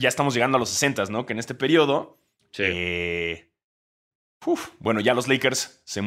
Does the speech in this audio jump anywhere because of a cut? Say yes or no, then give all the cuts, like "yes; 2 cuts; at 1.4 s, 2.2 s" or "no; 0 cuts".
no; 0 cuts